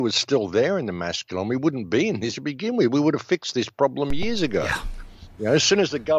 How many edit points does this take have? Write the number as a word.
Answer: one